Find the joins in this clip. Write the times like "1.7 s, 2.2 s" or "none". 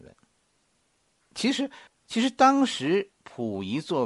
1.9 s